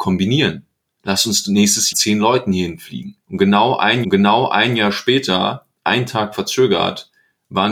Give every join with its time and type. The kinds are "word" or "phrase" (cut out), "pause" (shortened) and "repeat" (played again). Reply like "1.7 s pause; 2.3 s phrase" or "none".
1.9 s phrase; 3.2 s pause; 4.0 s repeat